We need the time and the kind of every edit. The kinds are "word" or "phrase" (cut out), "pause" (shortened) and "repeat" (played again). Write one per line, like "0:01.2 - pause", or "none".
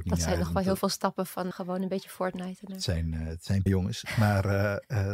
0:01.5 - word
0:03.7 - word